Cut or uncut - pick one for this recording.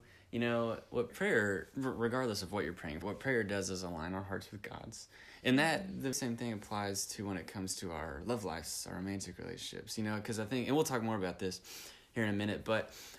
cut